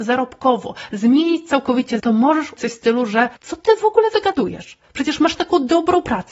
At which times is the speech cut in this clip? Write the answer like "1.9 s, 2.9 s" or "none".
2.0 s, 2.6 s, 3.4 s